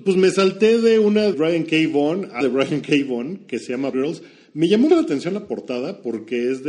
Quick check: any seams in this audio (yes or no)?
yes